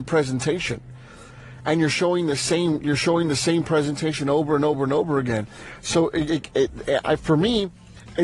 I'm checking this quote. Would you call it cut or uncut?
uncut